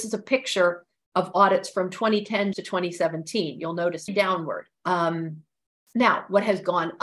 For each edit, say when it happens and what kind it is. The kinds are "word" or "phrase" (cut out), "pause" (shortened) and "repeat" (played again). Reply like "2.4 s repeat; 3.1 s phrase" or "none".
2.5 s word; 4.1 s word; 4.7 s pause